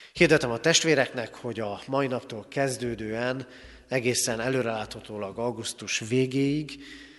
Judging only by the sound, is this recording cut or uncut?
uncut